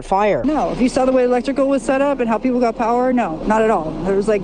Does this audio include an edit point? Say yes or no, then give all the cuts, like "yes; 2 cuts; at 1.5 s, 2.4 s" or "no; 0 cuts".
no; 0 cuts